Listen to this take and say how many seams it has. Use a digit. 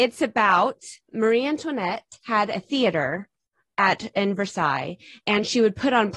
1